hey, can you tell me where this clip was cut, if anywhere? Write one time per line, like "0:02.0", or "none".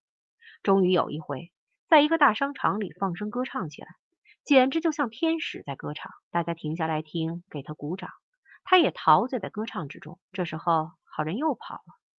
0:06.2
0:10.2